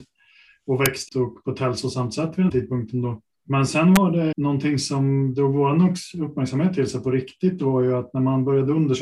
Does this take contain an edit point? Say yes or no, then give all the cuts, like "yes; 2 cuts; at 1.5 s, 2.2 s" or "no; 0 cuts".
yes; 3 cuts; at 1.1 s, 2.5 s, 4.3 s